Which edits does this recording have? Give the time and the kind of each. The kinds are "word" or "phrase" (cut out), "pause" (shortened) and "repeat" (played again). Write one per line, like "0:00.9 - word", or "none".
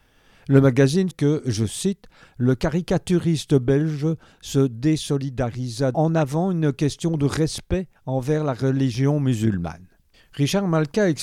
0:01.1 - word
0:05.9 - phrase
0:08.0 - pause